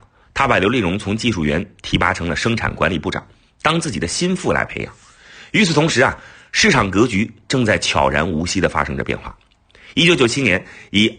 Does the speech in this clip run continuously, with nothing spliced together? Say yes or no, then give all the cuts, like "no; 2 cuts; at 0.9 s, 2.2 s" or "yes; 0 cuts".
yes; 0 cuts